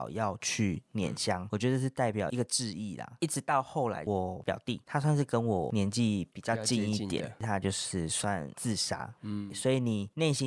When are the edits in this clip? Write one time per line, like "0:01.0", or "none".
none